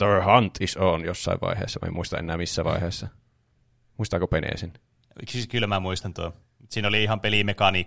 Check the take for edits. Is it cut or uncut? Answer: uncut